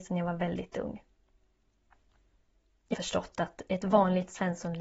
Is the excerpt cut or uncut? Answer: cut